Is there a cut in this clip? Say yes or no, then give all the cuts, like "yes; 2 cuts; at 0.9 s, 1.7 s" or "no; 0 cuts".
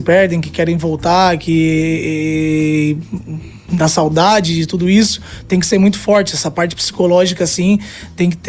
no; 0 cuts